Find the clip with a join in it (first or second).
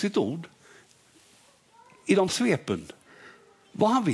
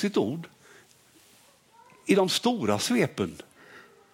first